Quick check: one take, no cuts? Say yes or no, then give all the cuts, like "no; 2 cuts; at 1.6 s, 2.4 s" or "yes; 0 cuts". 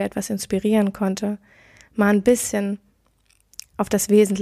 yes; 0 cuts